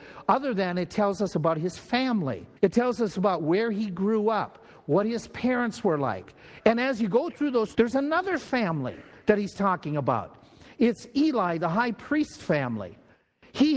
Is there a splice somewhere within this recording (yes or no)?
yes